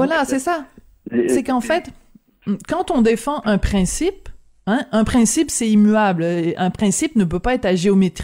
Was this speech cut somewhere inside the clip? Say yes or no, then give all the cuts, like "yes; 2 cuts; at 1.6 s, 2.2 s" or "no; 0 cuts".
no; 0 cuts